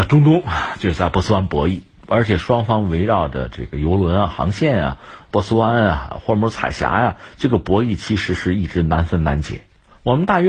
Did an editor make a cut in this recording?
yes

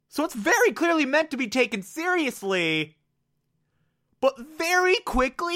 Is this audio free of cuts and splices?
yes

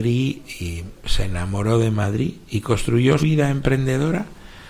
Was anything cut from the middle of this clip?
yes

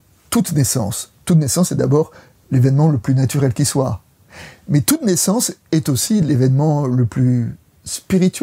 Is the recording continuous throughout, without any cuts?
yes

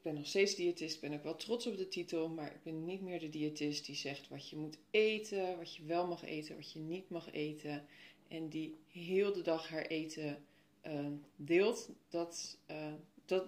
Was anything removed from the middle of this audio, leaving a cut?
no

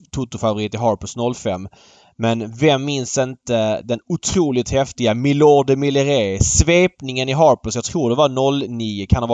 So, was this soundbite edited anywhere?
no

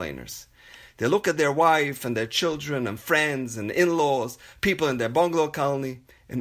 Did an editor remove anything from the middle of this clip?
no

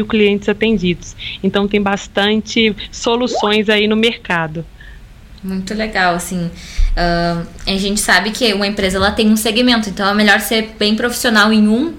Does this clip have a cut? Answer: no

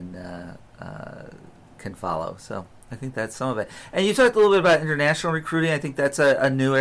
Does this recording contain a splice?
no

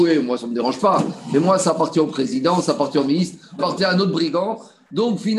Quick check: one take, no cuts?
no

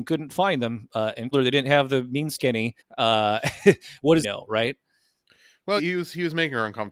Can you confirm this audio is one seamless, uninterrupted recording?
no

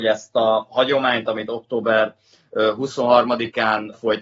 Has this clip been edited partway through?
no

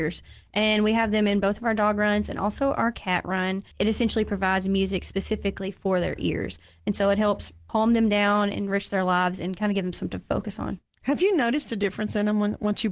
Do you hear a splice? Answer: yes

